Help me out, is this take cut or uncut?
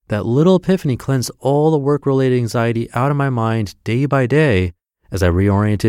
uncut